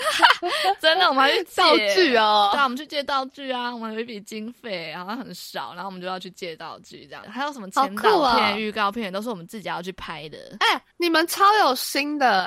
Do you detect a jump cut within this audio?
yes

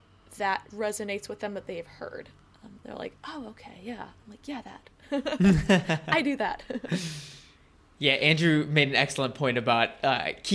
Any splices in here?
no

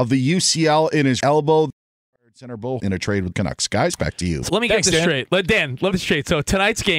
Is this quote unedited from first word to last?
no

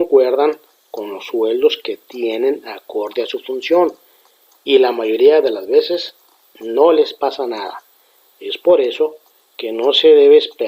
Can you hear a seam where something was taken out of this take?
no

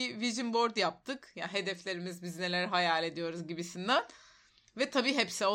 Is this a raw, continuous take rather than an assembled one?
yes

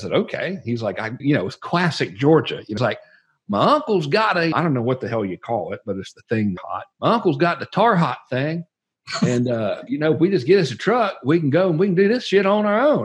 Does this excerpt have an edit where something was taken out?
yes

